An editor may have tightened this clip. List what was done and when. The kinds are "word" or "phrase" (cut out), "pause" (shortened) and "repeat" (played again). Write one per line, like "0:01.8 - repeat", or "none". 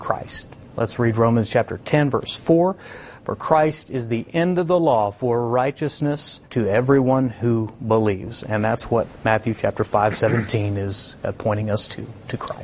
0:06.4 - pause